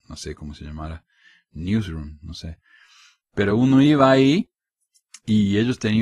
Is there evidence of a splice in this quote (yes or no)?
no